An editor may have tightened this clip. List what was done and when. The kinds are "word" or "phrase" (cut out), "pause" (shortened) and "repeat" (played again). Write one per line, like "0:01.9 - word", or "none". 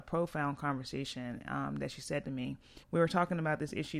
0:02.8 - pause